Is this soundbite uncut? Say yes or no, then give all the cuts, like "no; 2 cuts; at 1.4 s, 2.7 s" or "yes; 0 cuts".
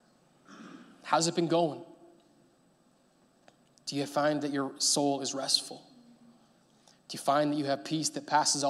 yes; 0 cuts